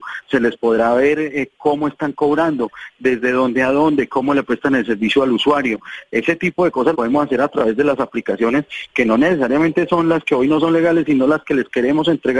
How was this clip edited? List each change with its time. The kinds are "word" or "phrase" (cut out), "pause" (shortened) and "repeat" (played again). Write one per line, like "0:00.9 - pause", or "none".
0:06.9 - word